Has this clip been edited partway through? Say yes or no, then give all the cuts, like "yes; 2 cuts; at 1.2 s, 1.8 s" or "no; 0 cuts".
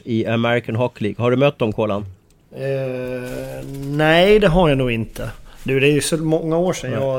yes; 1 cut; at 2.4 s